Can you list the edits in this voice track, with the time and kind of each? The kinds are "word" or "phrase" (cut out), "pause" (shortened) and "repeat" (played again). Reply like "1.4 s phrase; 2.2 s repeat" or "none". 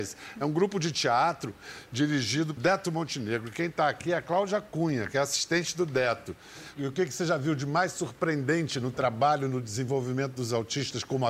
2.6 s word